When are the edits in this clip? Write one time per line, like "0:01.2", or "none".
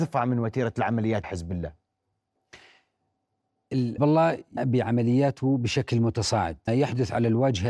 0:01.2
0:04.0
0:04.6
0:06.7